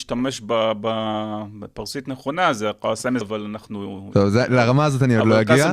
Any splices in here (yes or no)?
yes